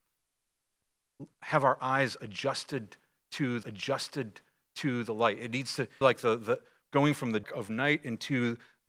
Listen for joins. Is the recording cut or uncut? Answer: cut